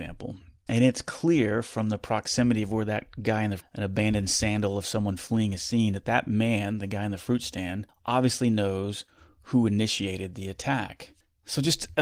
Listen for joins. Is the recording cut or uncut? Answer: cut